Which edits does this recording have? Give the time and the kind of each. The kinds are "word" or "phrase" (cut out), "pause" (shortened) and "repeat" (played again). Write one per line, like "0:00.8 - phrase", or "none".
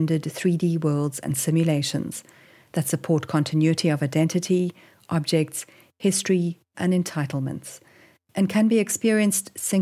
0:06.7 - word